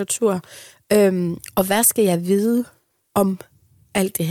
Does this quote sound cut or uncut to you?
uncut